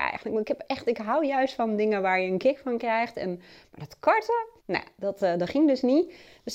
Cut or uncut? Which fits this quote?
cut